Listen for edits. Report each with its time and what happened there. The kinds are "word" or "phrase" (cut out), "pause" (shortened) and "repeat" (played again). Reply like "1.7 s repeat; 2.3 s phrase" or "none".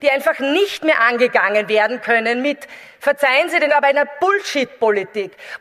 3.7 s word